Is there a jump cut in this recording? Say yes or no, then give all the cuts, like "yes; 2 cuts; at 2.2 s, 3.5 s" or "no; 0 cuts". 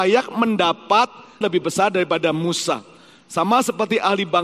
yes; 1 cut; at 1.4 s